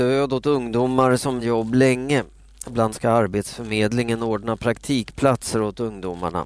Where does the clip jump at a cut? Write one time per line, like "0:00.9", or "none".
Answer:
0:01.4
0:02.9